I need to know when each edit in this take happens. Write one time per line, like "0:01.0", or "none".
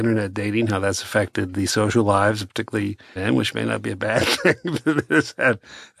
0:03.2